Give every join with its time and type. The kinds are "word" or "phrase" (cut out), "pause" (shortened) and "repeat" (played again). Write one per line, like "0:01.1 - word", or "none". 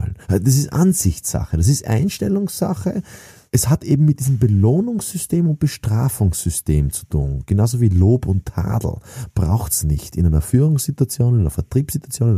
none

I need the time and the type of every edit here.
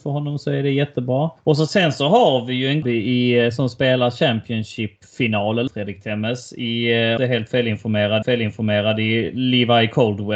0:01.4 - pause
0:02.8 - word
0:05.7 - word
0:07.2 - phrase
0:08.2 - repeat

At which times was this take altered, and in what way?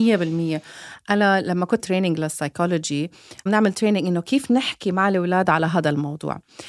0:01.8 - word
0:03.5 - phrase

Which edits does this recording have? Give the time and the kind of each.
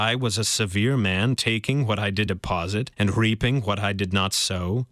0:02.3 - word
0:02.9 - pause

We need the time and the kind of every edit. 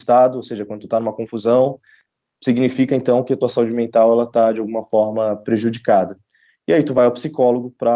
none

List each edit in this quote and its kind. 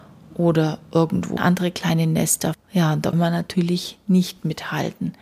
0:01.4 - word
0:02.5 - word
0:03.1 - word

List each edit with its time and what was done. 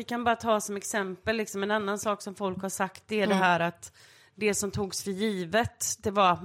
none

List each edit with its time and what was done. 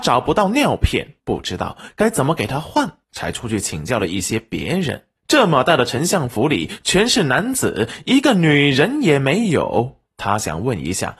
0:01.2 - pause
0:03.0 - pause
0:05.2 - pause
0:10.1 - pause

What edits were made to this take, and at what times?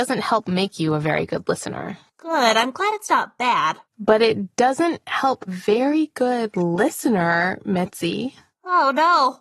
0:03.9 - pause
0:05.5 - phrase

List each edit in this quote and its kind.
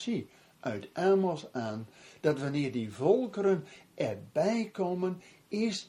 none

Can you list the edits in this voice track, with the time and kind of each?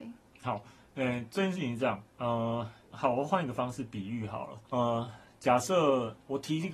0:04.6 - pause

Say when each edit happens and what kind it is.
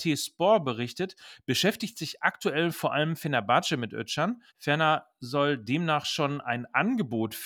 0:04.5 - pause

